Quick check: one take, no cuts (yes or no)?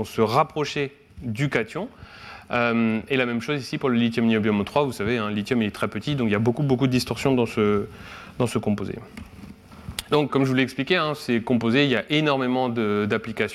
no